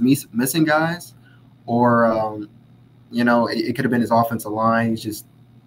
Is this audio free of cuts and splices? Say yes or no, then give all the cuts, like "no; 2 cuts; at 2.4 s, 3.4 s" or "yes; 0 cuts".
yes; 0 cuts